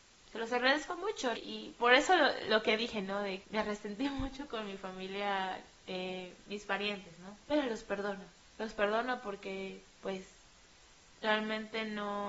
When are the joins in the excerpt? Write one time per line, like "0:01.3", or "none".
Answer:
0:01.4
0:03.4
0:07.4
0:08.4